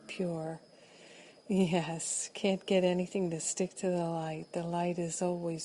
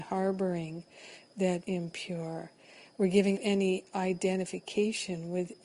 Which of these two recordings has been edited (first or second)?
second